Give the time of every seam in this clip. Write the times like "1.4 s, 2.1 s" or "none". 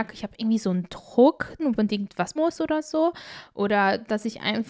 1.6 s, 2.4 s